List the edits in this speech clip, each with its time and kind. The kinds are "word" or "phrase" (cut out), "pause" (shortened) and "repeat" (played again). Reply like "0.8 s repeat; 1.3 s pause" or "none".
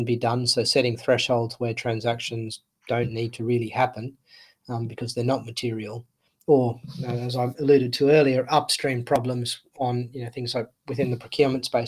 none